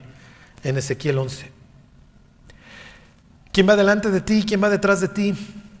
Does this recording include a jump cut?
no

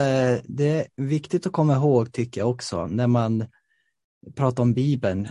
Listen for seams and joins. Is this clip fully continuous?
no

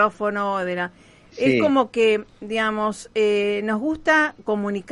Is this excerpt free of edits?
yes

